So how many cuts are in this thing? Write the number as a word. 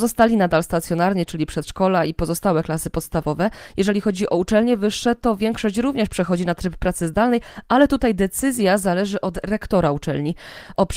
zero